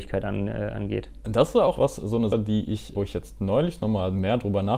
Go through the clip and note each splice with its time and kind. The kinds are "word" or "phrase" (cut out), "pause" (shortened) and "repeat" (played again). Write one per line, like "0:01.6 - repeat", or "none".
0:01.8 - word
0:02.3 - word
0:02.9 - word